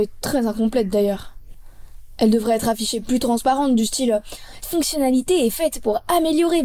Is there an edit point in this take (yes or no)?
yes